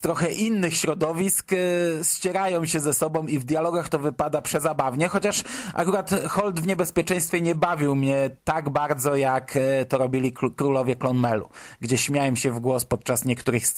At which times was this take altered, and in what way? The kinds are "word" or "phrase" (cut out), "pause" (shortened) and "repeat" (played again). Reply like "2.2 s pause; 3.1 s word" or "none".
8.4 s pause